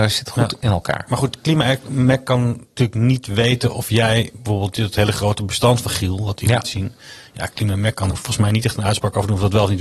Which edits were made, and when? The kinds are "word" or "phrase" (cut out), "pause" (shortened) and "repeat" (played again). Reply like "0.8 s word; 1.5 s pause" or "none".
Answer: 8.1 s word

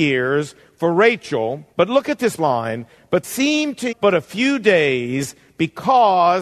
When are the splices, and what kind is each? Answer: 1.7 s pause; 2.4 s word; 3.2 s word; 3.9 s word

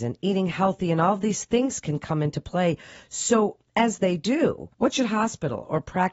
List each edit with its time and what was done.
3.7 s pause; 4.7 s pause

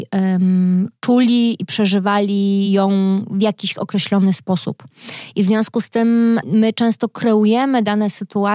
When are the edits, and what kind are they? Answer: none

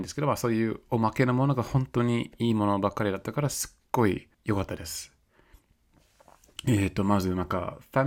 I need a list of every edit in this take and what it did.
4.3 s pause

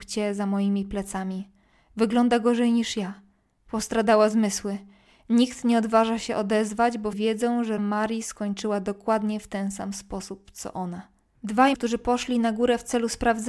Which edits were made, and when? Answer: 7.1 s word; 7.8 s word; 11.7 s word

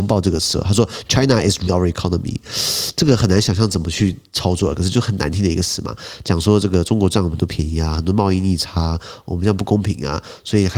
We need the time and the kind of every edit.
1.7 s word

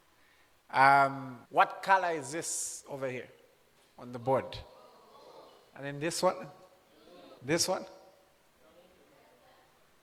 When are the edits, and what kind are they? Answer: 1.5 s pause; 7.4 s pause

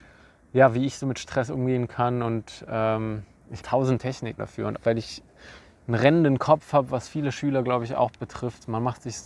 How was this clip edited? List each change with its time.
3.6 s word; 4.4 s word; 4.7 s word

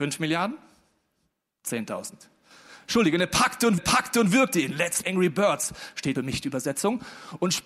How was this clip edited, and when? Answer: 3.8 s repeat; 5.0 s word; 6.2 s phrase

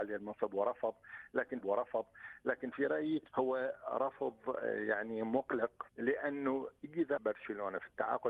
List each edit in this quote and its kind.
1.6 s repeat; 3.3 s pause; 5.9 s pause; 7.2 s word

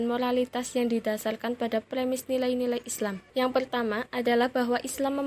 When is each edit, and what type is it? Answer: 3.3 s pause

